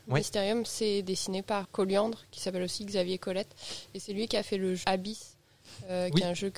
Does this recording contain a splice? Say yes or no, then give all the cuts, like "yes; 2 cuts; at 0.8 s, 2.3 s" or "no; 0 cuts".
yes; 2 cuts; at 1.6 s, 4.8 s